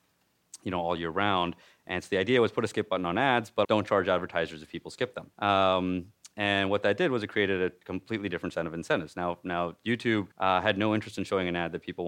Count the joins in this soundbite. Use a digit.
3